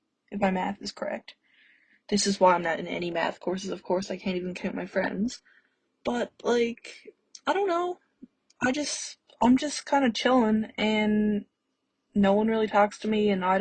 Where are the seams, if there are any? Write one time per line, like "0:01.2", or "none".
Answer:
none